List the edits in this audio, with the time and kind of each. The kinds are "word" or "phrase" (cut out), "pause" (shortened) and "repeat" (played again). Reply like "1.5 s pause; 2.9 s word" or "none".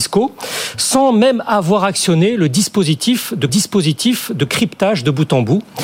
3.5 s repeat